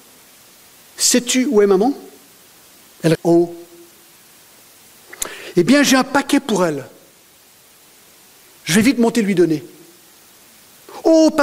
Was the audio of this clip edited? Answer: yes; 1 cut; at 3.1 s

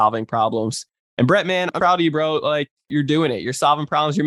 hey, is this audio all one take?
no; 1 cut; at 1.8 s

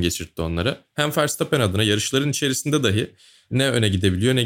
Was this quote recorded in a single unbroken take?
yes; 0 cuts

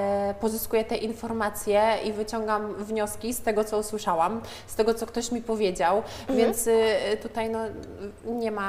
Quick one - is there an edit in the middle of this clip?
no; 0 cuts

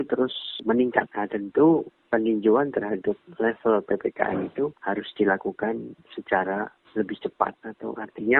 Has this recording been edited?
no; 0 cuts

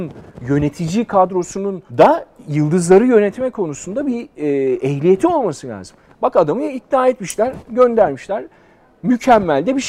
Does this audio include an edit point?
yes; 1 cut; at 1.9 s

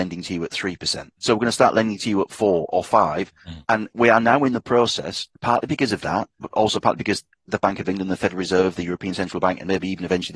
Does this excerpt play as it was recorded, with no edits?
no; 4 cuts; at 1.2 s, 3.4 s, 5.4 s, 6.3 s

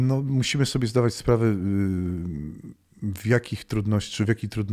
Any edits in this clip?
no; 0 cuts

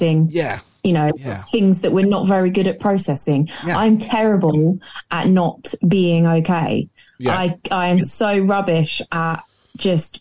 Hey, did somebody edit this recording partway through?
no; 0 cuts

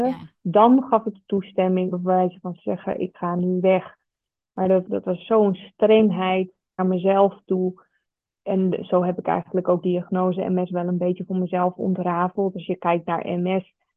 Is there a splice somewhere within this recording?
yes; 6 cuts; at 1.1 s, 1.9 s, 2.6 s, 4.9 s, 6.8 s, 9.8 s

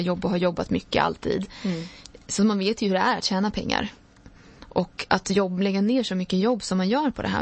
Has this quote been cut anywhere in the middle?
no; 0 cuts

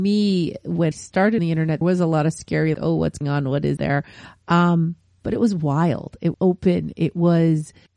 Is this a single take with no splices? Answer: no; 7 cuts; at 0.9 s, 1.4 s, 1.8 s, 2.7 s, 3.2 s, 3.8 s, 6.3 s

